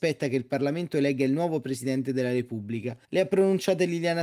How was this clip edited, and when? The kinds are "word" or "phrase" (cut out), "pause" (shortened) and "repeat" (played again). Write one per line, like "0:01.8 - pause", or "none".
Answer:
0:03.0 - pause